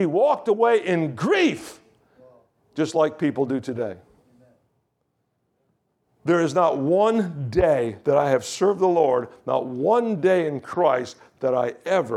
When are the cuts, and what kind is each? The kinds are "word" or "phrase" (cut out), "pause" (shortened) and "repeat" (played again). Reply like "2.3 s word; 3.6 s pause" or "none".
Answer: none